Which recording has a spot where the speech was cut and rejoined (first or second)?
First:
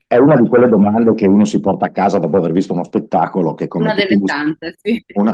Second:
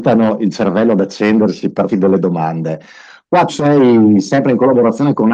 second